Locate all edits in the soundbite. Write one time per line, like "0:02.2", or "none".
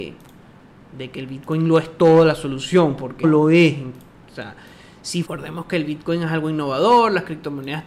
0:03.2
0:05.3